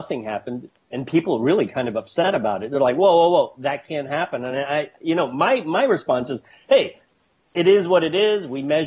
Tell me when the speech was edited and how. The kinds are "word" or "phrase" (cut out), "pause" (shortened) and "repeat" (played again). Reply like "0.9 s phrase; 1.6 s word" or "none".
none